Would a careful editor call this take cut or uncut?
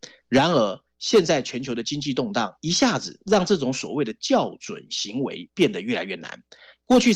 cut